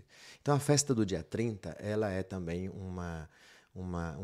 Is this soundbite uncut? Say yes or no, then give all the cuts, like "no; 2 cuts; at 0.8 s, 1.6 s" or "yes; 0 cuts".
yes; 0 cuts